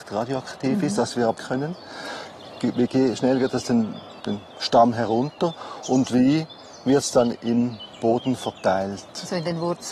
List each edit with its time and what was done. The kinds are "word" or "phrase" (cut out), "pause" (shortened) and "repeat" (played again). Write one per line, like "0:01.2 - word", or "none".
0:01.4 - word
0:04.2 - word